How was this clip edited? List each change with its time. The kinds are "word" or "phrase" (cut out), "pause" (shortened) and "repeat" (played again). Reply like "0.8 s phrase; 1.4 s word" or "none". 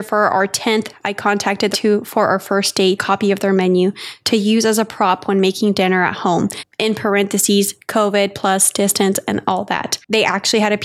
1.7 s phrase; 3.0 s phrase